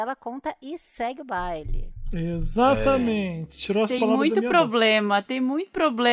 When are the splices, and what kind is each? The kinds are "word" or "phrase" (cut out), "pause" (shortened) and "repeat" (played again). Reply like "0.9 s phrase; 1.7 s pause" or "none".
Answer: none